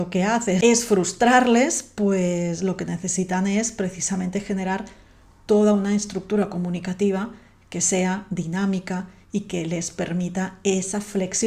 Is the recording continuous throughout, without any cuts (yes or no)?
yes